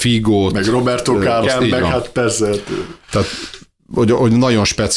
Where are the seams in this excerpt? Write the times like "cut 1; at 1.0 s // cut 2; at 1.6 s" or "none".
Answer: cut 1; at 1.4 s

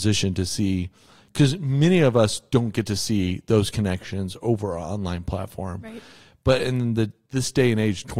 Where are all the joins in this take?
none

